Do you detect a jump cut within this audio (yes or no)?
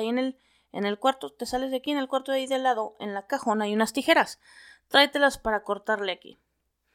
yes